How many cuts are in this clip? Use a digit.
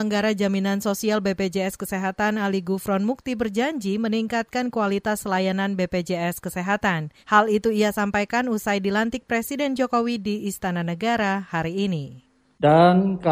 1